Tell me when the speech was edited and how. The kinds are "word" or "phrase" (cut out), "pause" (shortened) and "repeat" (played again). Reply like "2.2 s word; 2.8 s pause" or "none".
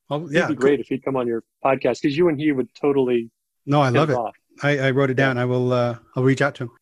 none